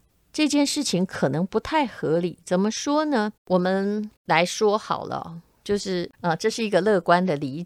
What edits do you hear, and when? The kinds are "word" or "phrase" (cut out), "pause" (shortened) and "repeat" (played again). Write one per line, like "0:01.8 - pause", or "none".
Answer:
0:03.4 - pause
0:04.2 - pause
0:06.1 - pause